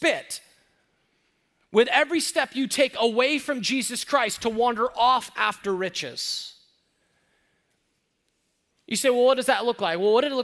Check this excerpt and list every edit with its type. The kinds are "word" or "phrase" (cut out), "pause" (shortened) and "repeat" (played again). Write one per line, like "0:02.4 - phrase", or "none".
none